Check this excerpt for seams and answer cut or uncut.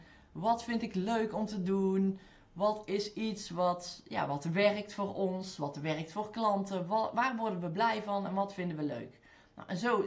uncut